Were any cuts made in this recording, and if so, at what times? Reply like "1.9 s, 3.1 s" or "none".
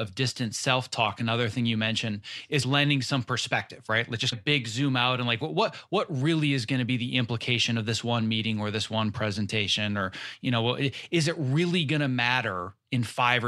2.6 s, 4.3 s